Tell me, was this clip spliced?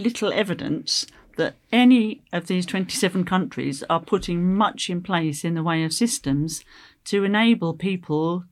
no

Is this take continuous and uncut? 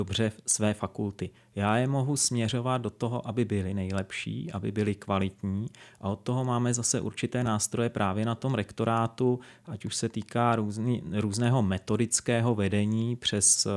yes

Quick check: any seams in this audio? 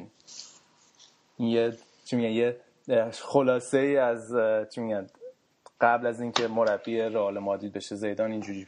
no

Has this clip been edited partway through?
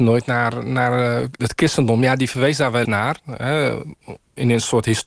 yes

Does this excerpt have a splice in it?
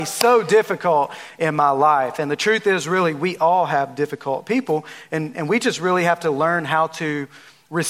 no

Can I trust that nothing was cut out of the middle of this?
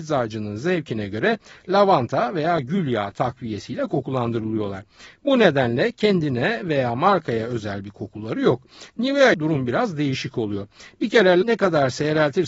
no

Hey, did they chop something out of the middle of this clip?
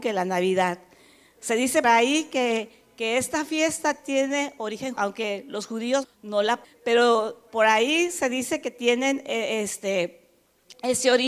yes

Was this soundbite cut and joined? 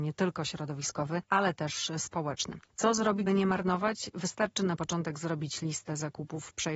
yes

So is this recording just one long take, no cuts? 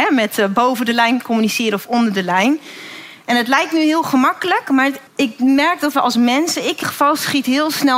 no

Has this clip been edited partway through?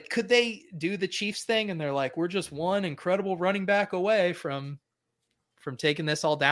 no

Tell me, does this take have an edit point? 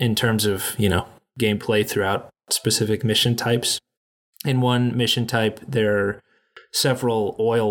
no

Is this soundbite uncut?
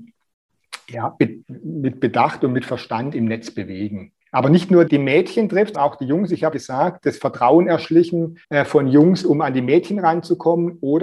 no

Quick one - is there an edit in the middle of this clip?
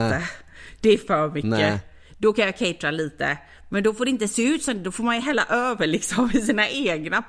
no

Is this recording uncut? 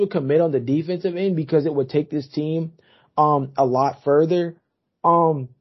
yes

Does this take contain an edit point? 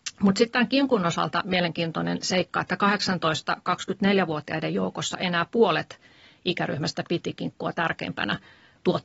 no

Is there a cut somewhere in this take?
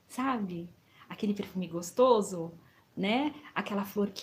yes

